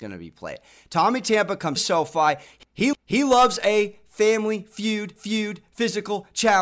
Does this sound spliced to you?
yes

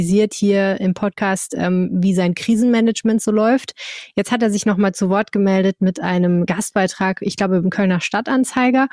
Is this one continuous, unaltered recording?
yes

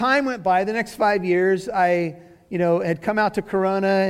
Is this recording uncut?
yes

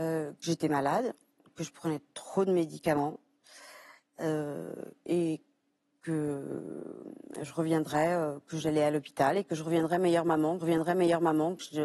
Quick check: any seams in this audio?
yes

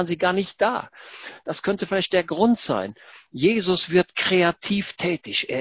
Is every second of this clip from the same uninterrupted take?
yes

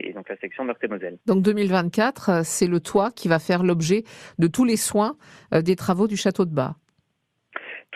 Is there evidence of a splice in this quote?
no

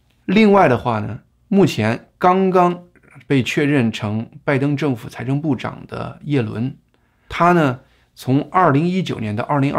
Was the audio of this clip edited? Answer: no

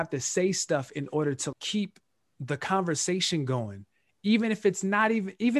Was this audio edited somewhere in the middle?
yes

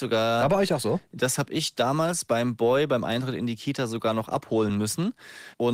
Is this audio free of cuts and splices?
yes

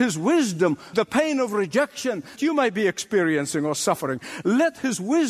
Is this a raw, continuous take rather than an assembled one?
no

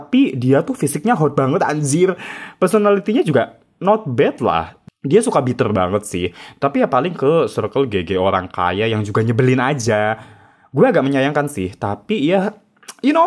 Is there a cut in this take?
no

